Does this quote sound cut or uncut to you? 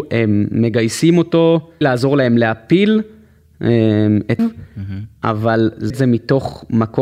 cut